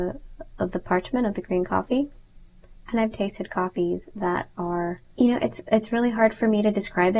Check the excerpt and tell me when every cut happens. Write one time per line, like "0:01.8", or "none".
0:03.1
0:05.1